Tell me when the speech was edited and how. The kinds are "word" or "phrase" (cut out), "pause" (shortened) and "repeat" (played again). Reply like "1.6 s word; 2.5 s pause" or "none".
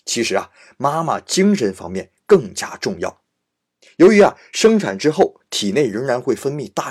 none

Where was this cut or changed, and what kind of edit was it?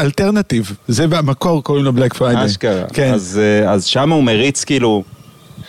none

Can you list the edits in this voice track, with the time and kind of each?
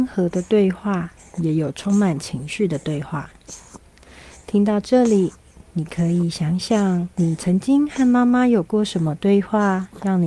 7.1 s pause

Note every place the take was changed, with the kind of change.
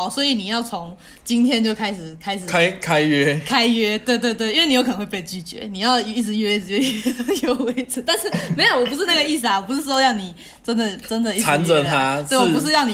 none

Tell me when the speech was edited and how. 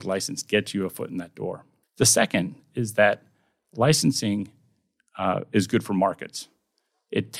1.8 s pause

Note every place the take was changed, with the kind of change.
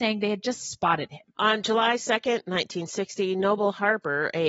none

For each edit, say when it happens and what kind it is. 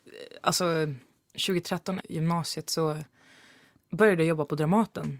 2.0 s word

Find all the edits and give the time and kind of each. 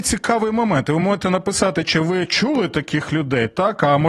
none

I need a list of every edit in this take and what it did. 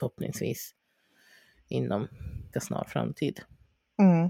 2.5 s phrase

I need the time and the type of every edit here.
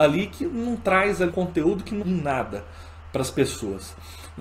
1.3 s word; 2.0 s word

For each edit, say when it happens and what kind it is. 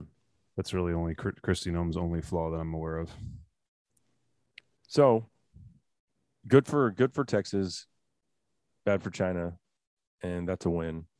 none

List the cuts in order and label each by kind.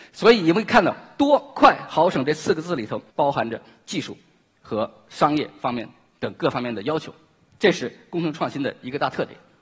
3.1 s pause

